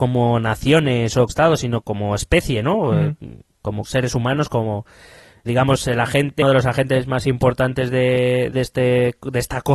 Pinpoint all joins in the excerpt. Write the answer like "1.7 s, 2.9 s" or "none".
1.3 s, 1.8 s, 3.8 s, 5.5 s, 6.4 s, 8.5 s